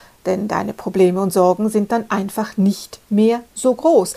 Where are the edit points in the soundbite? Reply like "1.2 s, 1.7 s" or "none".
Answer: none